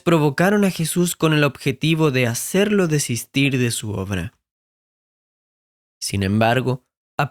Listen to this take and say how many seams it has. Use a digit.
0